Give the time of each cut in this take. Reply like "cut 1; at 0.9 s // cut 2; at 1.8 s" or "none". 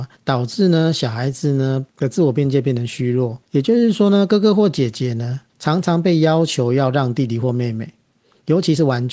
cut 1; at 1.9 s // cut 2; at 3.4 s // cut 3; at 5.5 s